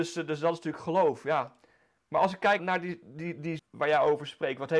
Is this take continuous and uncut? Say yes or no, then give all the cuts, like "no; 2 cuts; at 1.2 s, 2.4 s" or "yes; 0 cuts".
no; 2 cuts; at 2.6 s, 3.6 s